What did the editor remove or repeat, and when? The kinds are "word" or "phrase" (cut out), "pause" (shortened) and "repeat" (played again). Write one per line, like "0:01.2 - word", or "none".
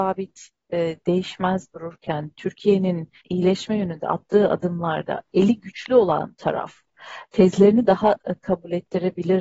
0:03.2 - pause